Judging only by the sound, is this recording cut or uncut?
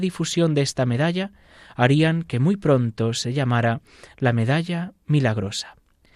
uncut